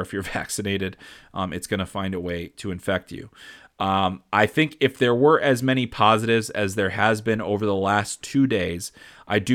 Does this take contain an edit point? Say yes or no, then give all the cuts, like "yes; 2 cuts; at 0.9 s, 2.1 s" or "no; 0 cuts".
no; 0 cuts